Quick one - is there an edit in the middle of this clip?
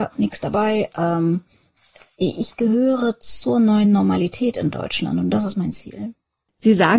no; 0 cuts

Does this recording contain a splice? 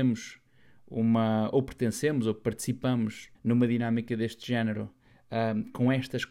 yes; 1 cut; at 3.3 s

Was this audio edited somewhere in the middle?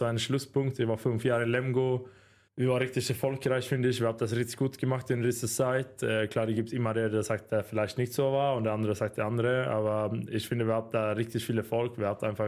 no; 0 cuts

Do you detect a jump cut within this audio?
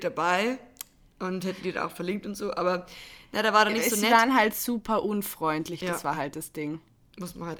no; 0 cuts

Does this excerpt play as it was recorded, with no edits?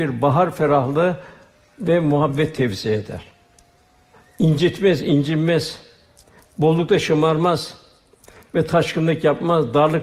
yes; 0 cuts

